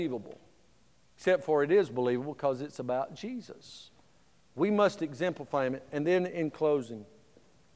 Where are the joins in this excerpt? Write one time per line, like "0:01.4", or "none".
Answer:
none